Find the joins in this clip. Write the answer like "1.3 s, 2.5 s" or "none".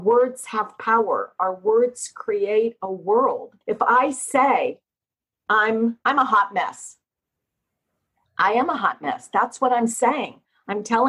3.6 s, 6.0 s